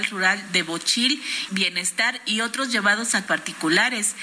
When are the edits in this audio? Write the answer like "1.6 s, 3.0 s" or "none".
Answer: 1.5 s, 3.3 s